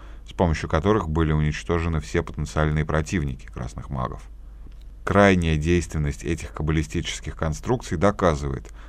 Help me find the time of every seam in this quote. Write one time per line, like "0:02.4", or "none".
none